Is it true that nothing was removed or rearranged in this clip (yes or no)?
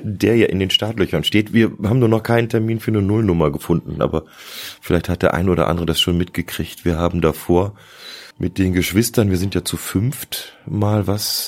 no